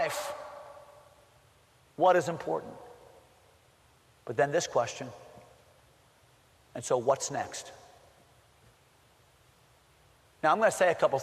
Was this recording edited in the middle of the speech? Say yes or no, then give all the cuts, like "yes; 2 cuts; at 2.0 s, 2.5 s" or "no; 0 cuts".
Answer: no; 0 cuts